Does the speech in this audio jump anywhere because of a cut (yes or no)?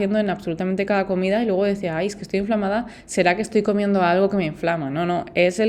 no